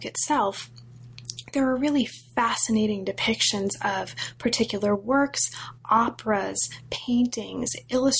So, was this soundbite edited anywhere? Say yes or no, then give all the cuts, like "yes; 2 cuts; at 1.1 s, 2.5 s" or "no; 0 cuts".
no; 0 cuts